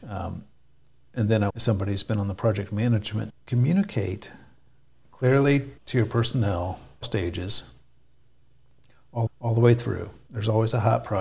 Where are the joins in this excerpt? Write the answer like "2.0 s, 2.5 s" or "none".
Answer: 1.5 s, 3.3 s, 5.8 s, 7.0 s, 9.3 s

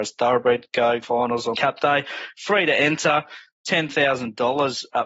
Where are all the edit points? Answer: 1.0 s, 1.5 s

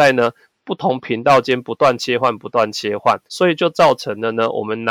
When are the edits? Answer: 3.3 s

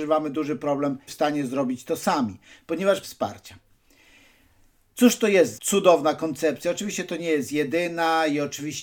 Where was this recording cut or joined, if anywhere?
1.1 s, 3.0 s, 5.5 s

